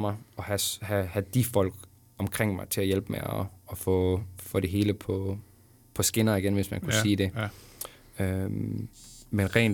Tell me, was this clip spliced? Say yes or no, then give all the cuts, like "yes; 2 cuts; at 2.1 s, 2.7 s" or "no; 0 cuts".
no; 0 cuts